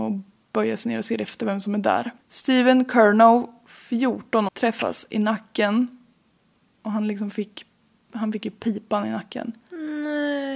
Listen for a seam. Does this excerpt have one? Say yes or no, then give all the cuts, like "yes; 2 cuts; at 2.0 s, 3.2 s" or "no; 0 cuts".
yes; 2 cuts; at 2.2 s, 4.5 s